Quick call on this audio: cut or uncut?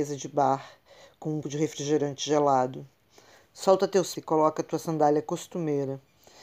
cut